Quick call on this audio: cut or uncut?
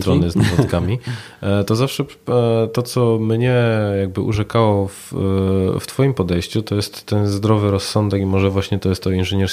uncut